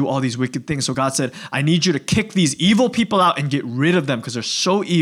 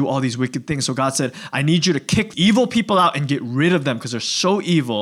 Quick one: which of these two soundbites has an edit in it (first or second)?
second